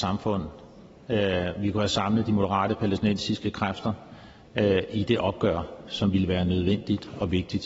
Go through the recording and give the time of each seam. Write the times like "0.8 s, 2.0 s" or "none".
none